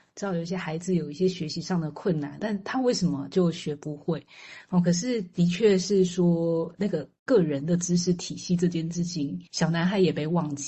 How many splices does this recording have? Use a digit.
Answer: 2